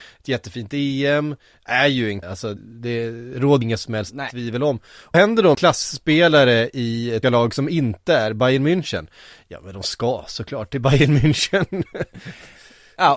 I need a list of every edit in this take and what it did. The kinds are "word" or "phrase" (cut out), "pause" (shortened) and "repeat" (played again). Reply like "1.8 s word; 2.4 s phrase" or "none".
2.2 s word; 2.6 s word; 3.6 s word; 5.1 s word; 5.5 s word; 7.2 s word